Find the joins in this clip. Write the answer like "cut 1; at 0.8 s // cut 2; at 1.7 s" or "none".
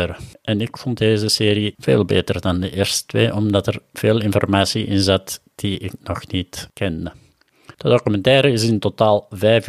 cut 1; at 7.7 s